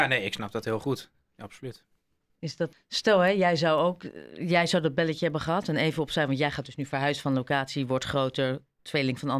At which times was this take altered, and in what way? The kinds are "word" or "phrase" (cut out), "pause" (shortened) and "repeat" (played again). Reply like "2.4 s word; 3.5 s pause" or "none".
2.7 s word